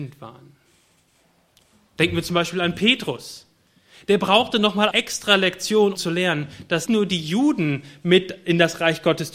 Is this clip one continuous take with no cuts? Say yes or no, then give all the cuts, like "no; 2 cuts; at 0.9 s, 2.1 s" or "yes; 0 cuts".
no; 3 cuts; at 4.9 s, 5.9 s, 6.9 s